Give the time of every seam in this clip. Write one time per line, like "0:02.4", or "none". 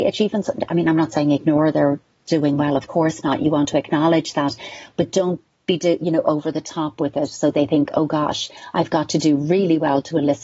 none